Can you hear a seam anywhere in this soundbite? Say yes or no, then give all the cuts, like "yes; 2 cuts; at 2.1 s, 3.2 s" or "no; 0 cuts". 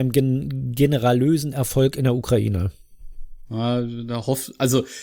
no; 0 cuts